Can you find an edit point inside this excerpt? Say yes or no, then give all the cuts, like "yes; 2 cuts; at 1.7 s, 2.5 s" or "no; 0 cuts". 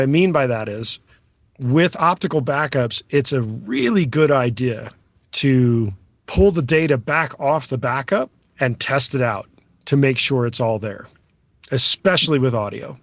no; 0 cuts